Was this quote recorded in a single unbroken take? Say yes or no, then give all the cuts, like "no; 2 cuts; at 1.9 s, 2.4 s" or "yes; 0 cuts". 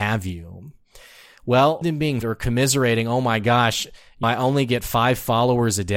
no; 3 cuts; at 1.8 s, 2.2 s, 4.2 s